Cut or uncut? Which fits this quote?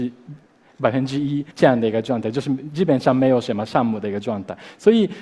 cut